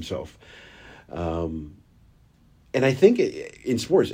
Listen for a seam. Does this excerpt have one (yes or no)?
no